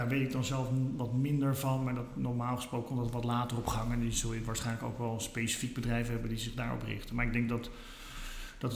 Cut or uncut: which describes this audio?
uncut